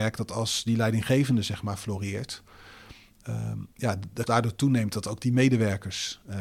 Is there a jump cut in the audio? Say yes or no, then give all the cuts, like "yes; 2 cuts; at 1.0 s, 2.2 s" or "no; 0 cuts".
yes; 2 cuts; at 3.7 s, 4.3 s